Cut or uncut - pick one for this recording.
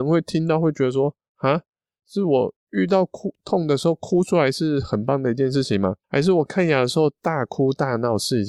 cut